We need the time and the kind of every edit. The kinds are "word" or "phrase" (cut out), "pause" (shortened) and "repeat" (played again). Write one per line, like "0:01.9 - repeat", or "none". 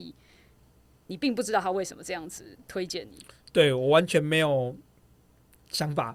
none